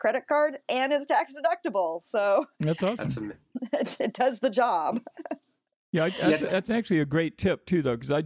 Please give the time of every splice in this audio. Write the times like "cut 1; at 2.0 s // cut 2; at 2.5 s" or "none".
none